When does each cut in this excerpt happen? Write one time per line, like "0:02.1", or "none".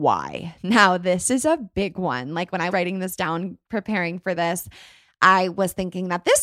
0:02.7